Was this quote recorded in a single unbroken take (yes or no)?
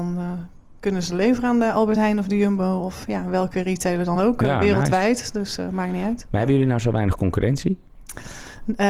yes